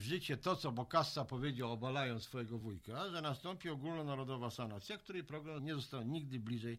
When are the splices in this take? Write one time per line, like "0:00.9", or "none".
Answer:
none